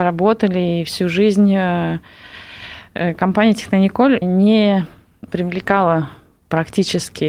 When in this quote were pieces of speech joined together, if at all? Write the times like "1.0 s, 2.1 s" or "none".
4.2 s, 5.3 s